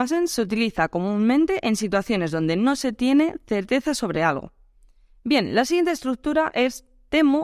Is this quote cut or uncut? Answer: uncut